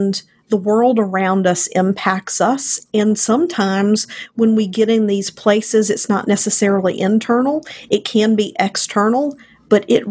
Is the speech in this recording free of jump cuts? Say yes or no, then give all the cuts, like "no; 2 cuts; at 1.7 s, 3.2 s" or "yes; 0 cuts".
yes; 0 cuts